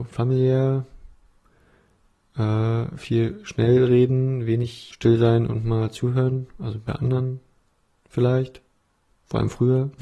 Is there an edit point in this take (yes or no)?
no